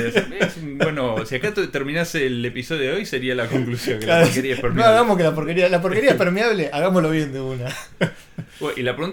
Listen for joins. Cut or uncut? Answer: uncut